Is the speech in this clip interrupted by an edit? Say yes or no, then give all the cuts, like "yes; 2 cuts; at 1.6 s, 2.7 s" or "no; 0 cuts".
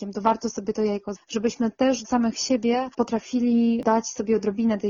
yes; 3 cuts; at 1.1 s, 2.0 s, 2.9 s